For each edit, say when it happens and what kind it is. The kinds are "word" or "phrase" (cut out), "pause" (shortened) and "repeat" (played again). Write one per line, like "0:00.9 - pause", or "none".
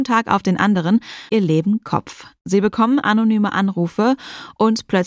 0:01.3 - word